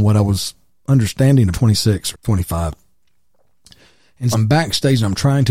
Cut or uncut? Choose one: cut